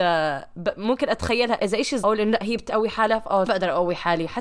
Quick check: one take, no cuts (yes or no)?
no